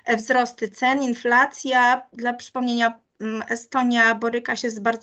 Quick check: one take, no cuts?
yes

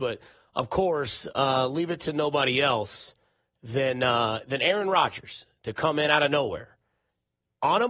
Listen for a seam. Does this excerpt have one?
no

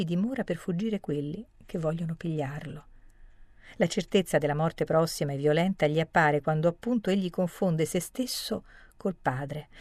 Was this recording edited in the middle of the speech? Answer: no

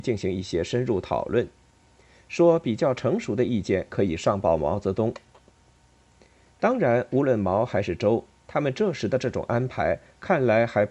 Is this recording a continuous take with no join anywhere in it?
yes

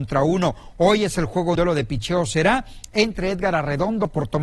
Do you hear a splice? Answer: yes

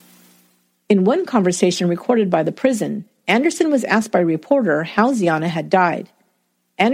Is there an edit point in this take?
no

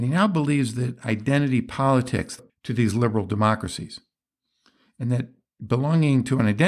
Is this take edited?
yes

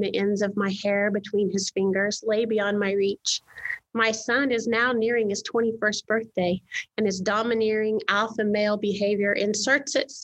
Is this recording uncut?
yes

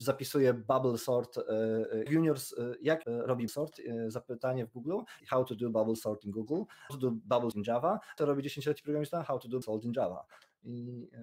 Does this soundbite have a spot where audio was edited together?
yes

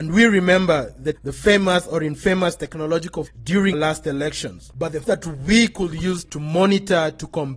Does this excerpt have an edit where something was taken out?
yes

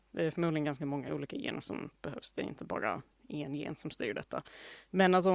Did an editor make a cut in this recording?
no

